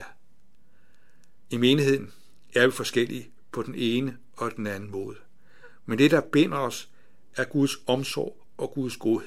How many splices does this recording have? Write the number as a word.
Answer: zero